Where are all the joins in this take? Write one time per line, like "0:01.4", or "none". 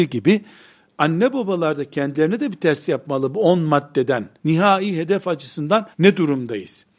0:04.4
0:05.9